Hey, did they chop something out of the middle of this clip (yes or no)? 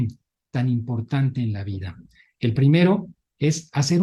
no